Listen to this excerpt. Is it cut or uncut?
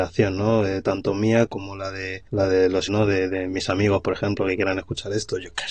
cut